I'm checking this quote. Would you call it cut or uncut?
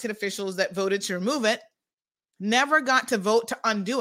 uncut